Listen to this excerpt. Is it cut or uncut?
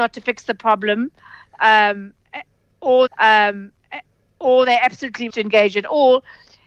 cut